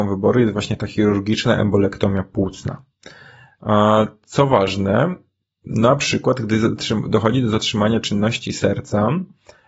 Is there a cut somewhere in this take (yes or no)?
no